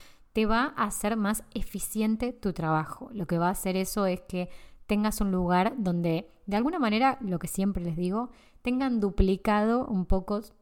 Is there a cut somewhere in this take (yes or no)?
no